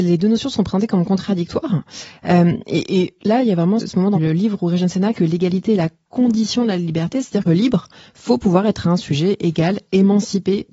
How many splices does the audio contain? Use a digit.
4